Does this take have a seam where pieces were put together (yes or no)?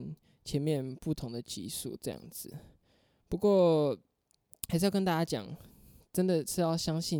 no